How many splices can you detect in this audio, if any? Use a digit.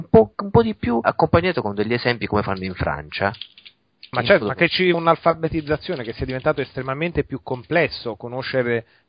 3